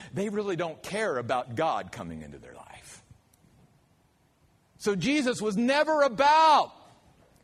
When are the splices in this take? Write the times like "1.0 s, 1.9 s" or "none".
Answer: none